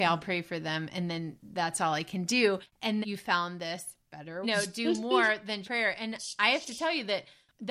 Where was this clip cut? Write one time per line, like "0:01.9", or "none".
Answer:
0:03.0
0:04.4
0:05.6

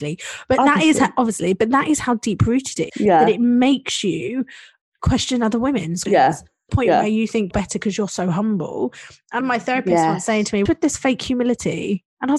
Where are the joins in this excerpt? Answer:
0:02.9
0:05.0
0:06.1
0:06.7
0:07.5
0:09.4
0:10.7

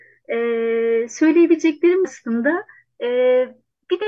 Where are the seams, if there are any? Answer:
0:02.0

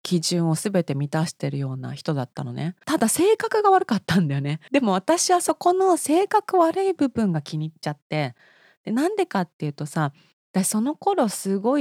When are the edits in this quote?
0:02.8

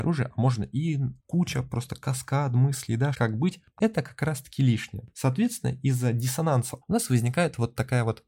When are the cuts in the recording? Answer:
0:01.2
0:03.1
0:03.8
0:06.8

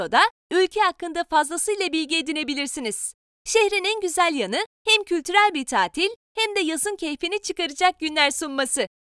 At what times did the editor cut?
none

